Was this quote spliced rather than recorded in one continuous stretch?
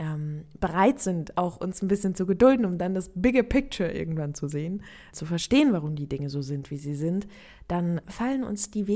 yes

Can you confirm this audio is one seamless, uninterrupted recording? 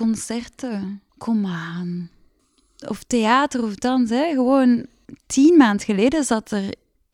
no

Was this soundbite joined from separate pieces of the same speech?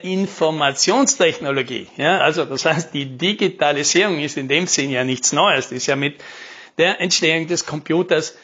no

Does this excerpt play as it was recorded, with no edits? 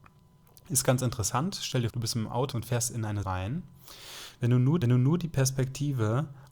no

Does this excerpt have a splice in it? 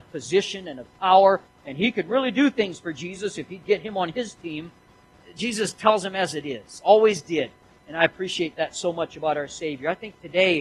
no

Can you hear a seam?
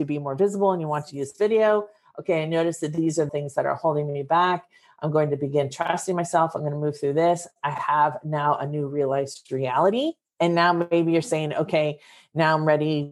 yes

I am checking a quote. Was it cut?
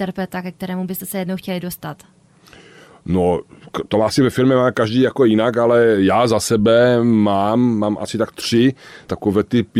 no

